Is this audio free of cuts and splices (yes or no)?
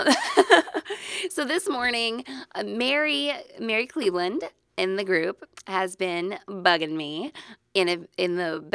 yes